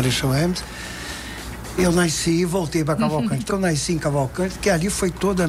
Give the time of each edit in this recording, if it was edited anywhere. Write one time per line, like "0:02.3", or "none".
0:03.5